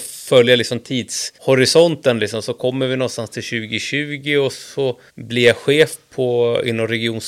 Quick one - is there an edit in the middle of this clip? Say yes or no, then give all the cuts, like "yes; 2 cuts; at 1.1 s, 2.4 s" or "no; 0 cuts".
yes; 2 cuts; at 1.4 s, 5.1 s